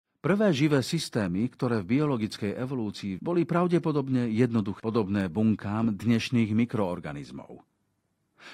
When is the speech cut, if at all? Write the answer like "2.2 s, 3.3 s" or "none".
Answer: 3.2 s, 4.8 s